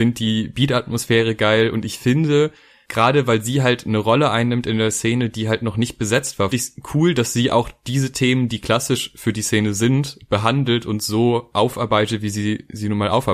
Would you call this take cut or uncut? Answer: cut